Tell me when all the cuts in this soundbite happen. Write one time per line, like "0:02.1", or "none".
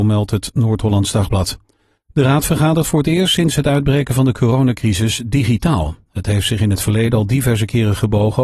none